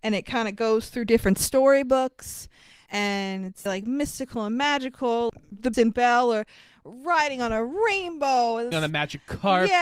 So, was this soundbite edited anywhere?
yes; 3 cuts; at 3.7 s, 5.7 s, 8.7 s

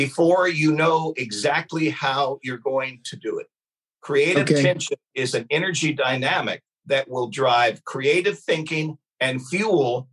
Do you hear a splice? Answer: no; 0 cuts

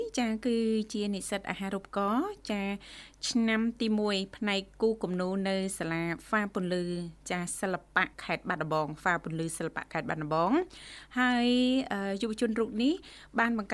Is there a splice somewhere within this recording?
yes; 1 cut; at 8.1 s

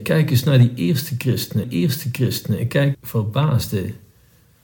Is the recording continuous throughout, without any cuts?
no; 2 cuts; at 1.6 s, 2.9 s

